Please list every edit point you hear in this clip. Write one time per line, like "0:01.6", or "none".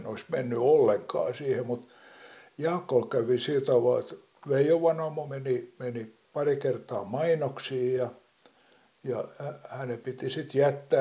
none